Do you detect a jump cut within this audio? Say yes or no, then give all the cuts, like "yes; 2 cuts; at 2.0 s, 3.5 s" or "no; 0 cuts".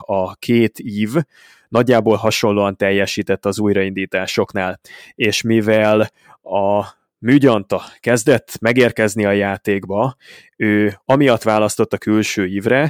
no; 0 cuts